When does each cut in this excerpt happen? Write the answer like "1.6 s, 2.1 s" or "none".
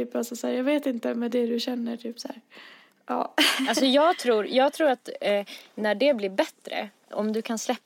none